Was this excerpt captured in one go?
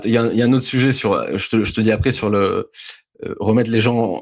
yes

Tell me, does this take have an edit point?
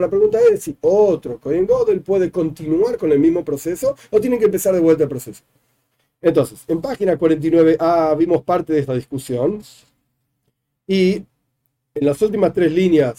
no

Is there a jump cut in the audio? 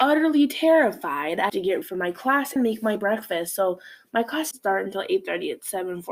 yes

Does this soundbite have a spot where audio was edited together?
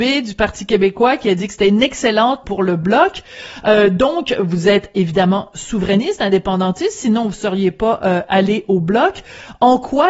yes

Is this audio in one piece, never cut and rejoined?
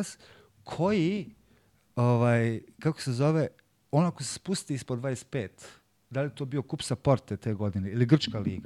yes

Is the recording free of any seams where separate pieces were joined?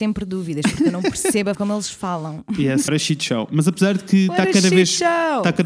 no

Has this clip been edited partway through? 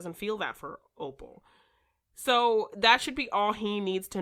no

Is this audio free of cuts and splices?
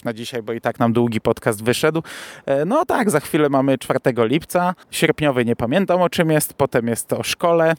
no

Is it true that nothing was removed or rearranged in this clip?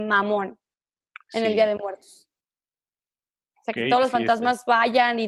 yes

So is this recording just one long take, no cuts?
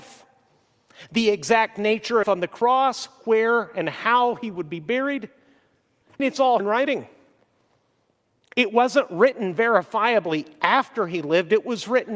no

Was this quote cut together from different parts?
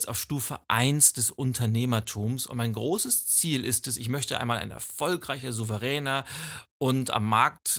no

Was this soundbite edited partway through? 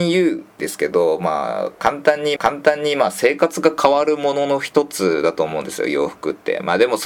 yes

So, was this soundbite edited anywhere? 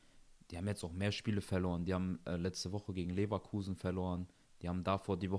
no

